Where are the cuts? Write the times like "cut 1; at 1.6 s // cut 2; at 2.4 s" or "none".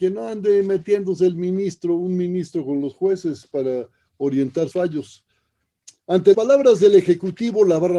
cut 1; at 4.7 s // cut 2; at 6.3 s